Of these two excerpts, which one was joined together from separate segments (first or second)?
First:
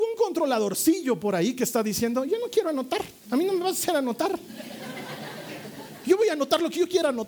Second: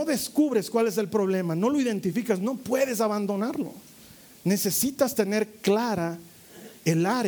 first